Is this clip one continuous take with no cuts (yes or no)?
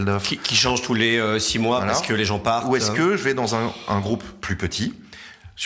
yes